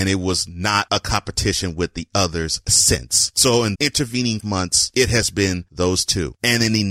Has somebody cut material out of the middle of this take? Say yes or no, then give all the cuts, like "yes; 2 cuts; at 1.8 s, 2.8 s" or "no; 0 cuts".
yes; 2 cuts; at 3.8 s, 4.4 s